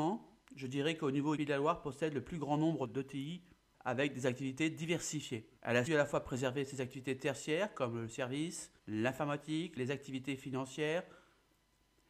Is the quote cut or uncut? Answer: cut